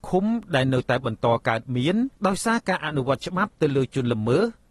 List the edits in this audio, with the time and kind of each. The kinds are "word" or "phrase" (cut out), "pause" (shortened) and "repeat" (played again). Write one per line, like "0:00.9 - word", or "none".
0:02.2 - pause